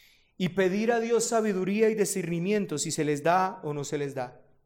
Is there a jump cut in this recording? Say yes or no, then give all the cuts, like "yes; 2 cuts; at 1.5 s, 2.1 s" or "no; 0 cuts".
no; 0 cuts